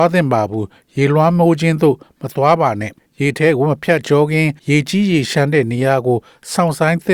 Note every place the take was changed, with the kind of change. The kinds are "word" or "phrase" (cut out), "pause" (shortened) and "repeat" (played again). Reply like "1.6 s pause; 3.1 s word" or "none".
3.0 s pause; 4.6 s pause